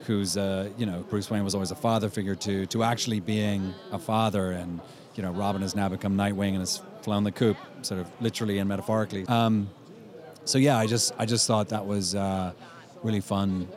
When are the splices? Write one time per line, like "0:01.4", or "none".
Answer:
0:01.0
0:09.3

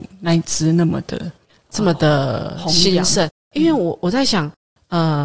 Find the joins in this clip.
0:01.5

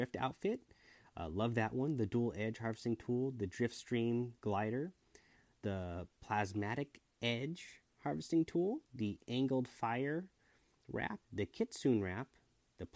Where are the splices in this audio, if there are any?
0:04.4
0:08.9
0:11.2

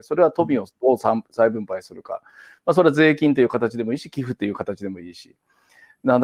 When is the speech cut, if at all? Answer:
none

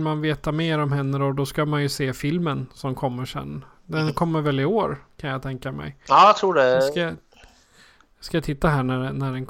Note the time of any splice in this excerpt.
none

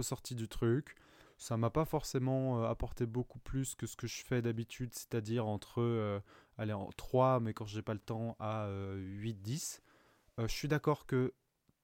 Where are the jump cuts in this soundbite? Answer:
none

